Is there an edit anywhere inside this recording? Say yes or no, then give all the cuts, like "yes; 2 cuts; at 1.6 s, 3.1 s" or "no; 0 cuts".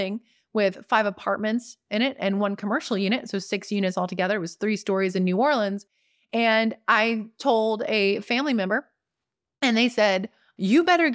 no; 0 cuts